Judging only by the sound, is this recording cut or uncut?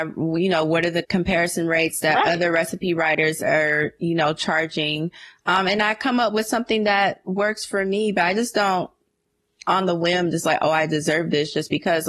uncut